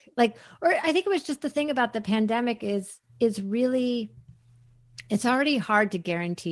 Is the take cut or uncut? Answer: cut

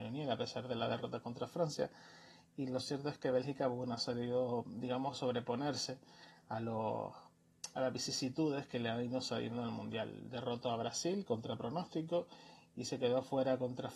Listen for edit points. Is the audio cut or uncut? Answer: uncut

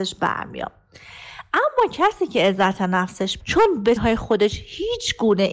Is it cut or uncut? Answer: cut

